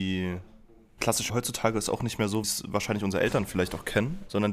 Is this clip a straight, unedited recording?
no; 2 cuts; at 1.3 s, 2.4 s

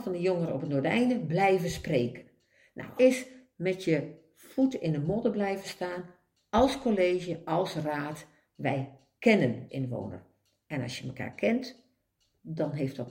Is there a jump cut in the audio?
yes; 2 cuts; at 3.0 s, 9.7 s

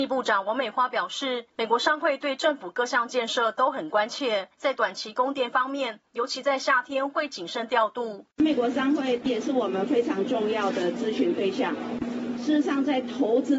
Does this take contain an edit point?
yes; 1 cut; at 8.3 s

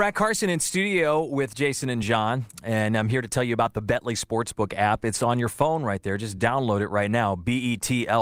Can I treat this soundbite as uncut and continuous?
yes; 0 cuts

